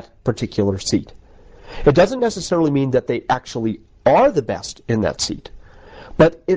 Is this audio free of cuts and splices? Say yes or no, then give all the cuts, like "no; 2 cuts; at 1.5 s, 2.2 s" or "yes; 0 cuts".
yes; 0 cuts